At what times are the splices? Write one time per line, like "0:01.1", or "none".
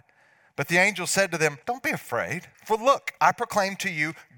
0:01.6
0:02.5
0:03.2